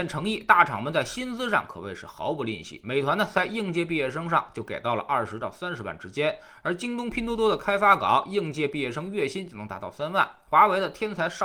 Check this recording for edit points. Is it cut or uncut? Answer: uncut